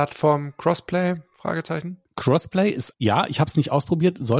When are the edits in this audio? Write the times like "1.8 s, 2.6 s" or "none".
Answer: 2.0 s, 2.9 s